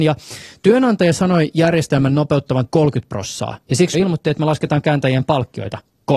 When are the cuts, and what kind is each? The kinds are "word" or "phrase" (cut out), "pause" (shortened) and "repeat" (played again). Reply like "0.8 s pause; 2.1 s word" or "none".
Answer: 2.7 s word; 3.6 s pause; 3.9 s word